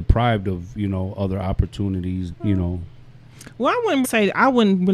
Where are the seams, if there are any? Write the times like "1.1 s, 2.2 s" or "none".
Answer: 2.3 s, 4.0 s